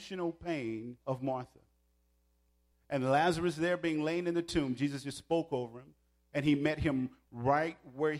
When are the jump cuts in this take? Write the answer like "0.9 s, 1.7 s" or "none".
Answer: 1.0 s